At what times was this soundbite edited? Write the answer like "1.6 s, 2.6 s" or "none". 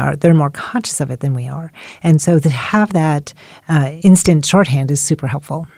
none